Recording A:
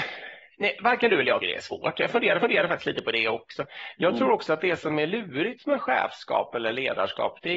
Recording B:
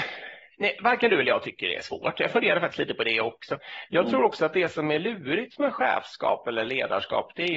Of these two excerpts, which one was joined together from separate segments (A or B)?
A